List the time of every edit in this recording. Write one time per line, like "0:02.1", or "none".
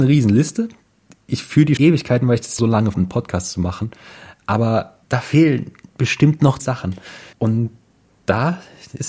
0:01.8
0:02.6
0:02.9
0:05.0
0:06.6
0:07.3